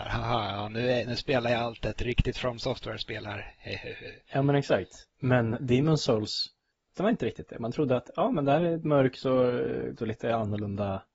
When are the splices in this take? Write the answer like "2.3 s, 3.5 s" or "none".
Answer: 7.0 s, 10.0 s